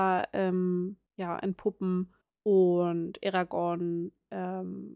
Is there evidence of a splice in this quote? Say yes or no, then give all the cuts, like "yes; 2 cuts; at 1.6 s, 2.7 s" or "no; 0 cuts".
yes; 2 cuts; at 1.1 s, 2.2 s